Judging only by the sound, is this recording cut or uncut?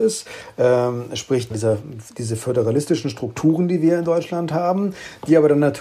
cut